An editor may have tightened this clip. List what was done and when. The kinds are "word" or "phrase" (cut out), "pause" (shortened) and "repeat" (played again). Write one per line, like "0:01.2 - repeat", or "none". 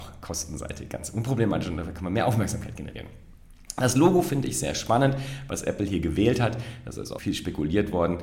0:07.2 - word